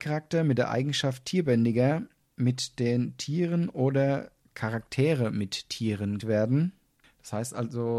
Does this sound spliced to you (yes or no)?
yes